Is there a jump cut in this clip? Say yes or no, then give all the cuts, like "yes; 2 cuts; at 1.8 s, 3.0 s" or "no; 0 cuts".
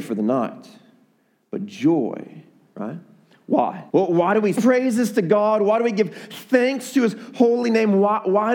yes; 3 cuts; at 2.7 s, 3.9 s, 4.6 s